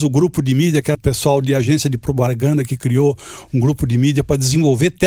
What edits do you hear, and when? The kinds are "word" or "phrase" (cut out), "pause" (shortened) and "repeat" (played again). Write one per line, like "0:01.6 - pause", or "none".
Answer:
0:00.9 - word

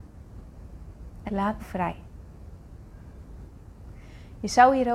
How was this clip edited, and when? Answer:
0:01.3 - word
0:01.6 - word

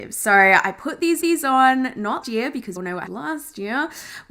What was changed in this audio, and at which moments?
0:01.2 - repeat
0:02.2 - word
0:02.8 - word
0:03.1 - word

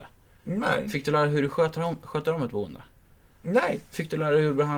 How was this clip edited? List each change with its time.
none

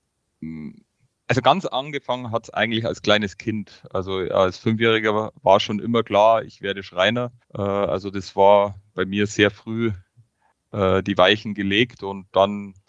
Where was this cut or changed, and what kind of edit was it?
0:05.4 - pause
0:07.4 - pause

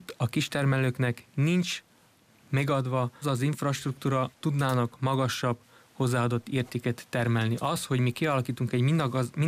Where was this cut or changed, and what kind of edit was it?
0:03.2 - word
0:04.3 - word

